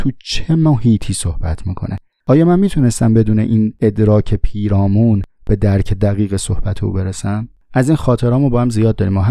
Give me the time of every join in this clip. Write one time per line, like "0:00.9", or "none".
none